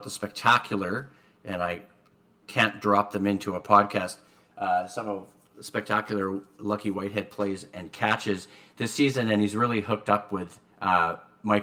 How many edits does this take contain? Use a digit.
0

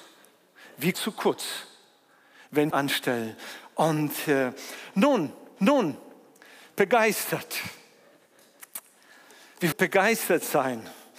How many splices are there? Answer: 4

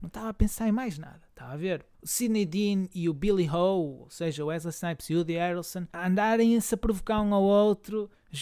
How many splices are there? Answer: 0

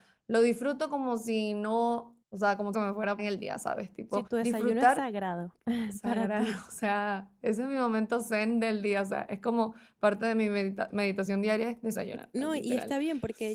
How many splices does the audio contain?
4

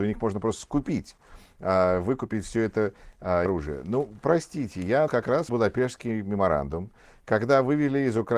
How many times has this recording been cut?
3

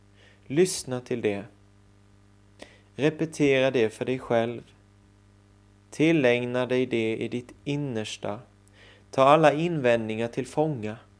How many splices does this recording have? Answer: 0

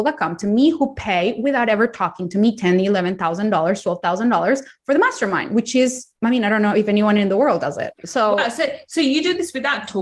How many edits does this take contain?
2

